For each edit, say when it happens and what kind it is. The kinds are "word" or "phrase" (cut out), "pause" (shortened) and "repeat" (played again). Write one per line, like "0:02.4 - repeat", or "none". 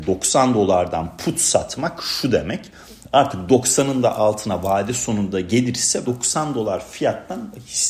0:06.1 - word